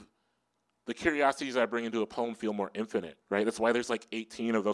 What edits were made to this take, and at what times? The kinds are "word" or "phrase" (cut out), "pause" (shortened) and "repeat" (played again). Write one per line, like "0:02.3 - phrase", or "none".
0:03.2 - pause